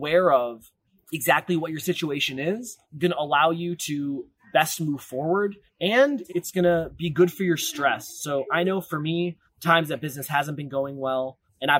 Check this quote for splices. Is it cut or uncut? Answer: uncut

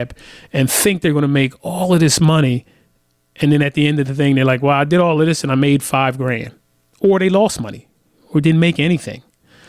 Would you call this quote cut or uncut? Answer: uncut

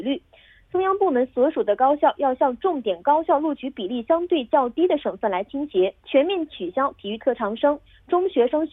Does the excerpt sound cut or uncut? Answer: cut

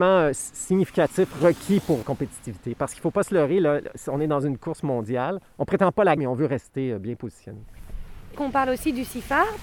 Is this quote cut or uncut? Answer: cut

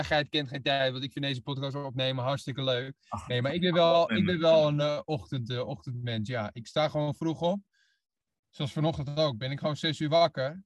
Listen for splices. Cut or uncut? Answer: uncut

